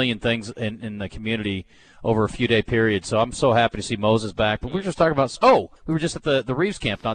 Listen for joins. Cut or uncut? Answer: cut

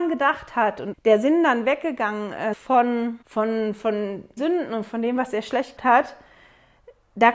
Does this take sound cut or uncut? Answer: cut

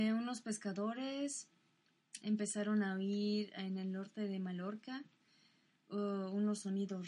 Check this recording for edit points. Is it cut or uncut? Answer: uncut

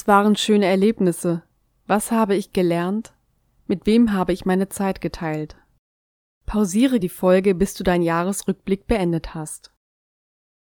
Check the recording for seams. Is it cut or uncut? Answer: cut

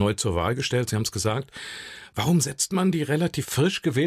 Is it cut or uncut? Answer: uncut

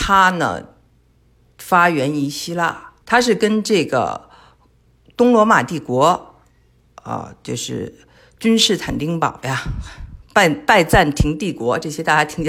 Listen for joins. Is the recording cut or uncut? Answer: cut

